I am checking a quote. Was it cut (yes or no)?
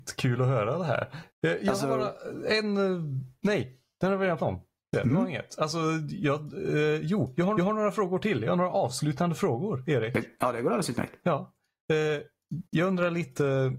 yes